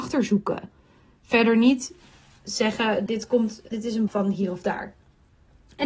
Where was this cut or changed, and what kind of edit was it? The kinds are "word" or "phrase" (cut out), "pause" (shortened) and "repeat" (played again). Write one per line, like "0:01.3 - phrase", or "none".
0:03.1 - word
0:03.7 - word
0:04.1 - word